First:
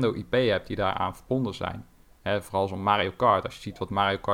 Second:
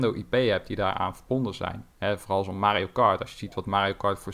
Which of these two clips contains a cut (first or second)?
second